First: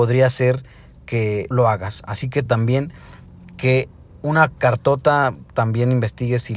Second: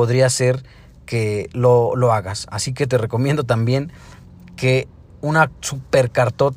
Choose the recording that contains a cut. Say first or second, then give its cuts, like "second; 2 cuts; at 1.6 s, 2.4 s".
first; 3 cuts; at 1.5 s, 2.5 s, 4.6 s